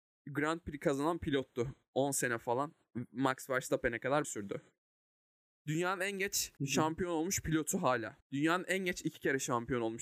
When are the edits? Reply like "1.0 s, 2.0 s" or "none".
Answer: 4.2 s, 6.6 s, 8.2 s